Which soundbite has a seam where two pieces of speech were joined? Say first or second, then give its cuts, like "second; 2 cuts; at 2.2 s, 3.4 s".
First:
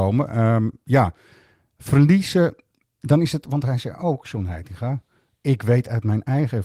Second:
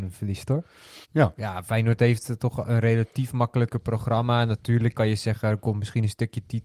second; 2 cuts; at 1.0 s, 4.9 s